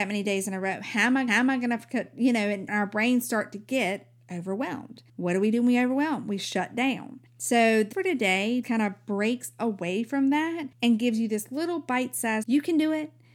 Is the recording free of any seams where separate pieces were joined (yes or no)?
no